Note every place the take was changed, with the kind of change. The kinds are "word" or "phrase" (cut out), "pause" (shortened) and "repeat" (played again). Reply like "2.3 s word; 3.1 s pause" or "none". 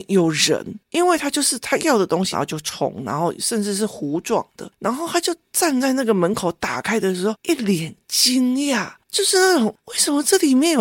2.3 s phrase; 9.0 s pause; 9.8 s pause